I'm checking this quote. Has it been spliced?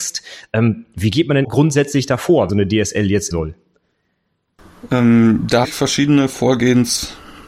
yes; 4 cuts; at 1.4 s, 2.5 s, 3.3 s, 5.6 s

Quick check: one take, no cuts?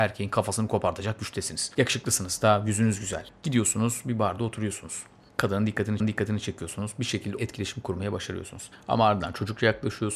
no; 2 cuts; at 6.0 s, 7.4 s

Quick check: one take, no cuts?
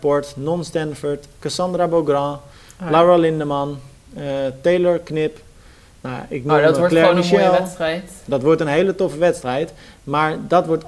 yes; 0 cuts

